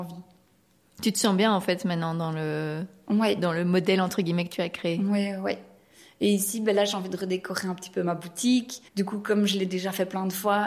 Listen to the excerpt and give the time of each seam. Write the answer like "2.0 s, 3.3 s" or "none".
8.9 s